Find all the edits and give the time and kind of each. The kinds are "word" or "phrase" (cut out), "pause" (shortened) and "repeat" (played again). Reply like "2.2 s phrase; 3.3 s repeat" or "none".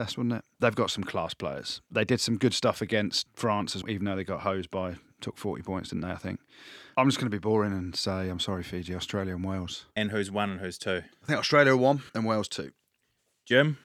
3.8 s word; 9.9 s pause; 12.1 s pause